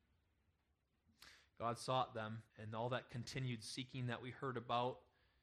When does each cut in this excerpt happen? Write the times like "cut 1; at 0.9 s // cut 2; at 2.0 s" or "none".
cut 1; at 2.5 s